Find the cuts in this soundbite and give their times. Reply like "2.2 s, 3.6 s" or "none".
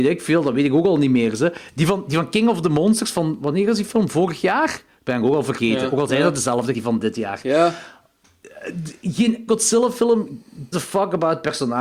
6.7 s, 9.5 s, 10.7 s

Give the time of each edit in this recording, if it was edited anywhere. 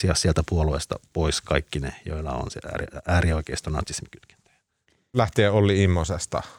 none

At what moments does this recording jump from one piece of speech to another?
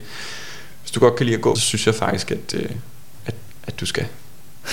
1.6 s

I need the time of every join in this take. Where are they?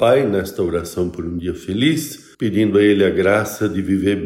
2.3 s

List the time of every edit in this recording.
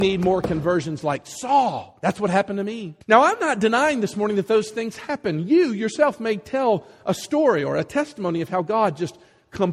2.0 s, 3.0 s

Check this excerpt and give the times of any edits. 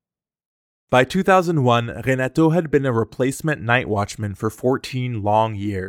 none

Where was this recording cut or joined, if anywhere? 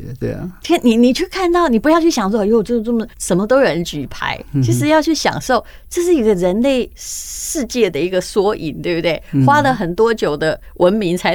3.1 s, 6.9 s

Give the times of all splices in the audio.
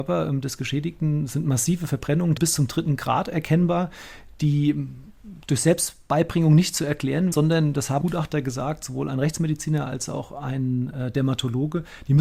2.4 s, 7.3 s, 8.0 s

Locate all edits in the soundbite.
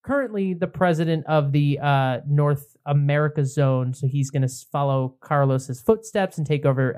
none

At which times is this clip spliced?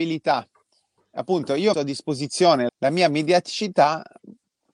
1.7 s, 2.7 s

